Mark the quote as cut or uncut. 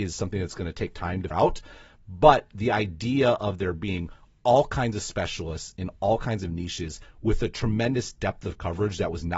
cut